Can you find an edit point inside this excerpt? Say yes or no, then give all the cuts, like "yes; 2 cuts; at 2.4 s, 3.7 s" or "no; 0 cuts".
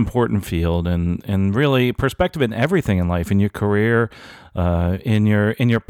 no; 0 cuts